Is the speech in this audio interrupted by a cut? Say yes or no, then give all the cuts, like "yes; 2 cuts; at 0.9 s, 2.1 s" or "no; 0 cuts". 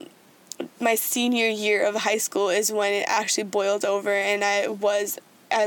no; 0 cuts